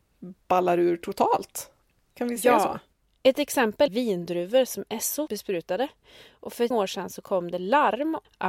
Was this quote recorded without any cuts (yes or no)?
no